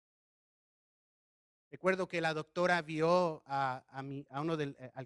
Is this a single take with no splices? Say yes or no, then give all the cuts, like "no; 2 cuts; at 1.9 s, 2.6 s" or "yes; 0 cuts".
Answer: yes; 0 cuts